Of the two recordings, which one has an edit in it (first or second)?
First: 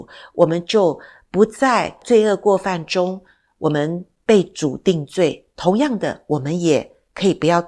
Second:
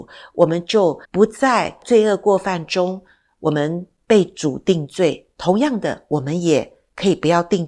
second